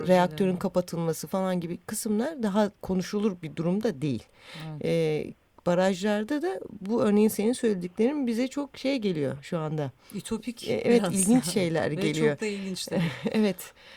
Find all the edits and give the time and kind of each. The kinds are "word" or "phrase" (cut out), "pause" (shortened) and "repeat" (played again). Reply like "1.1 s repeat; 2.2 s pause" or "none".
2.8 s pause